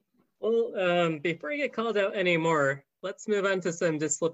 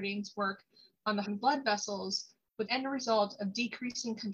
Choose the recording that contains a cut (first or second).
second